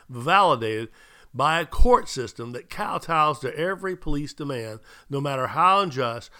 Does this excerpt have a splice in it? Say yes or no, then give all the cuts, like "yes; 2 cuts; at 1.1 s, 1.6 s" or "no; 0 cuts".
no; 0 cuts